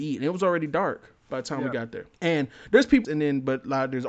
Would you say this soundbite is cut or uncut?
cut